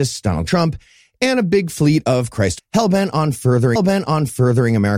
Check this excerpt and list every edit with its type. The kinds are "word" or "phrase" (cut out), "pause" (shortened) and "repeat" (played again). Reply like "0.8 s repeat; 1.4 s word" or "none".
2.6 s word; 3.8 s repeat